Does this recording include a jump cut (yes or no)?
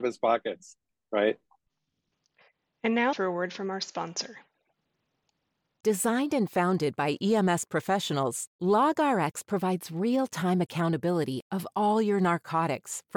yes